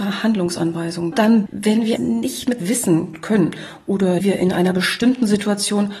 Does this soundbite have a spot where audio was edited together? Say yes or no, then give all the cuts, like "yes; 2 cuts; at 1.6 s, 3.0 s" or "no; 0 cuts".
yes; 5 cuts; at 1.1 s, 1.5 s, 2.0 s, 2.6 s, 4.2 s